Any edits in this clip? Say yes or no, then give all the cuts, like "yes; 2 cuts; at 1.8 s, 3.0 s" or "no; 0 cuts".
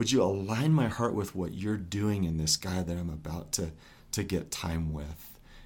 no; 0 cuts